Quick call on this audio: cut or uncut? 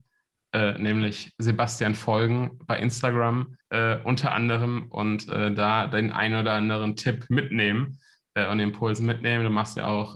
cut